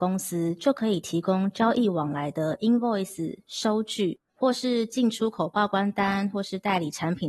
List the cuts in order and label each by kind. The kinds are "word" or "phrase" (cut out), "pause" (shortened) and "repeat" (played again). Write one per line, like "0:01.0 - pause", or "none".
none